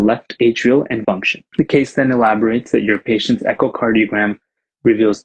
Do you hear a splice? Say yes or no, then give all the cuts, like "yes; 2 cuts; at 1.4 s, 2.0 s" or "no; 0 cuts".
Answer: yes; 2 cuts; at 1.0 s, 1.5 s